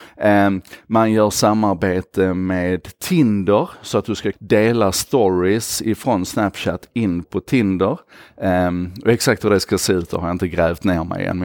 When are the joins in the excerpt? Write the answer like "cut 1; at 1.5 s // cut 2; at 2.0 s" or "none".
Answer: cut 1; at 4.3 s // cut 2; at 7.2 s